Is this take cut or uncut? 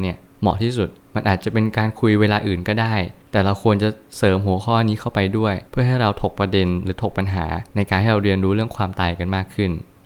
cut